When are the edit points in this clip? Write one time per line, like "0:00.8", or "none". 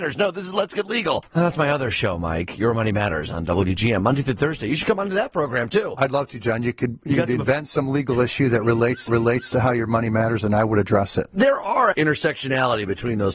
0:01.3
0:09.1
0:11.9